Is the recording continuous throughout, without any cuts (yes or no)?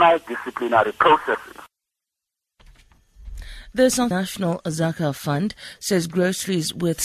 no